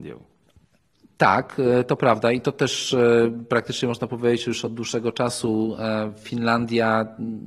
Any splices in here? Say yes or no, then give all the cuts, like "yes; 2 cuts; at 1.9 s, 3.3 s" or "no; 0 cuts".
no; 0 cuts